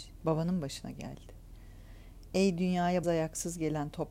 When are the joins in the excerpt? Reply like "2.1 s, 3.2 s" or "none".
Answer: 3.0 s